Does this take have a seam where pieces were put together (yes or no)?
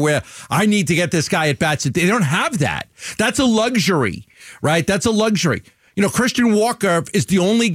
no